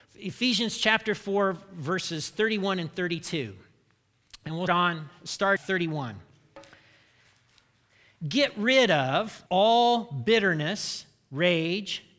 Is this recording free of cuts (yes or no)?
no